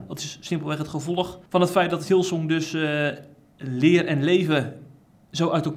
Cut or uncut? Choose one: cut